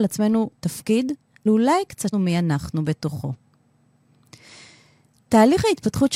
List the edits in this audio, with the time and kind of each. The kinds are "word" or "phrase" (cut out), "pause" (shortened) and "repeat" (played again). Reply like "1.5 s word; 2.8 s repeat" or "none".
1.5 s word; 2.1 s word